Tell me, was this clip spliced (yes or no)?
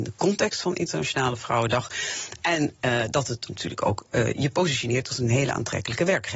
yes